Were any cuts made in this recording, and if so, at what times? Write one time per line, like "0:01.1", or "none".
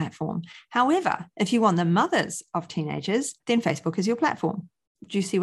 0:03.4